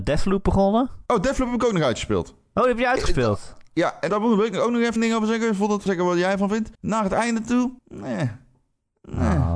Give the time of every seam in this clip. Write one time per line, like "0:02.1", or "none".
0:01.1
0:04.1
0:05.0
0:05.9
0:06.7
0:07.8